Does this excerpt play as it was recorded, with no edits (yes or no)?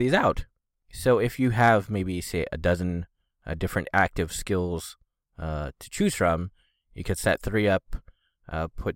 yes